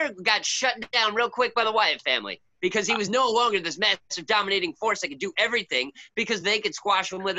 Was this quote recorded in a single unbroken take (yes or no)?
yes